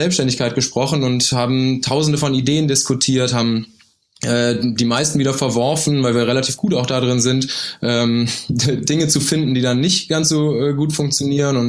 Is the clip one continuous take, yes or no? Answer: yes